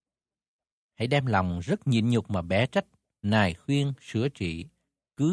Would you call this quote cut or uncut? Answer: uncut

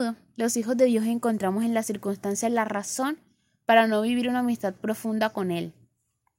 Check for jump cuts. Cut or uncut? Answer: uncut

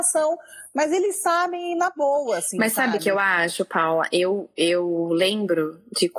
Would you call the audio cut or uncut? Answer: uncut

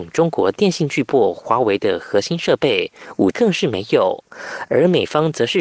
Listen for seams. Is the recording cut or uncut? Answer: cut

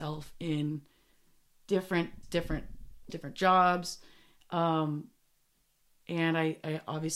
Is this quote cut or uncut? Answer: cut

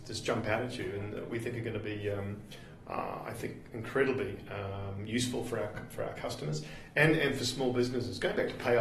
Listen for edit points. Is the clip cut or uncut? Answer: uncut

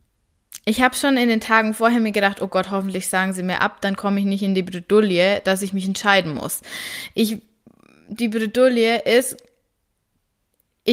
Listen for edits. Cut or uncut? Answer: uncut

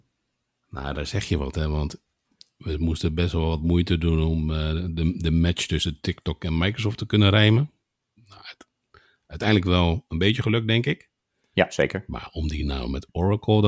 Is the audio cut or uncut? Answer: uncut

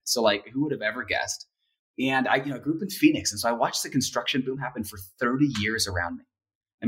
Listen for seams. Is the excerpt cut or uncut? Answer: uncut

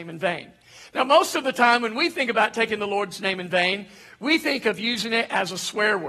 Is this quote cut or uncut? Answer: uncut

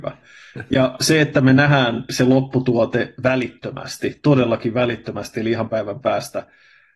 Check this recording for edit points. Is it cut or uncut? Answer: cut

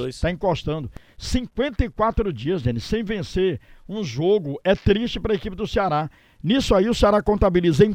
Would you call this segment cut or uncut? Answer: uncut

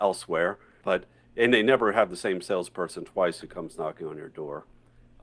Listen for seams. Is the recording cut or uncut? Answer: uncut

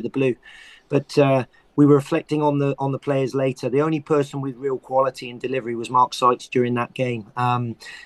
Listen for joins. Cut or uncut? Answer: uncut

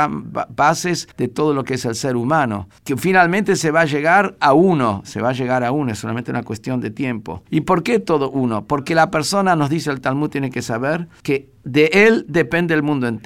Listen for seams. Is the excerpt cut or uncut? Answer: cut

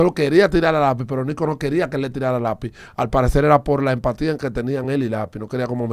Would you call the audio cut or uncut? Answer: uncut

